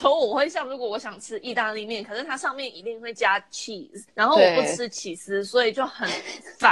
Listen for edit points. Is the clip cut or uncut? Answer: cut